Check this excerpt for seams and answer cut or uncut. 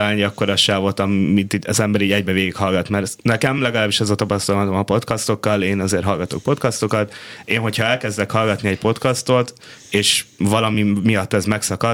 uncut